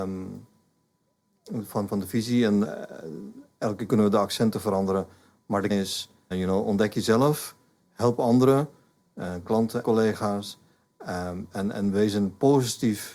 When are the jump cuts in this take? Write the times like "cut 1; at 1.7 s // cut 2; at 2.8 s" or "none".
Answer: cut 1; at 1.9 s // cut 2; at 2.6 s // cut 3; at 3.9 s // cut 4; at 5.7 s // cut 5; at 6.3 s // cut 6; at 9.8 s